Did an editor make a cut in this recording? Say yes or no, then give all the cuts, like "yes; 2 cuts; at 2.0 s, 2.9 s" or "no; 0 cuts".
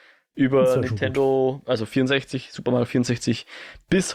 no; 0 cuts